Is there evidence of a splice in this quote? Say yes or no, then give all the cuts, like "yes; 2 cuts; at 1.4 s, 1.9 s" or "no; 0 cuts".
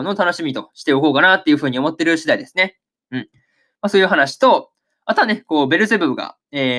no; 0 cuts